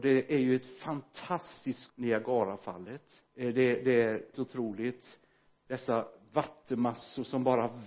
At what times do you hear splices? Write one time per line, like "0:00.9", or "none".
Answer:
0:01.9
0:03.3
0:04.3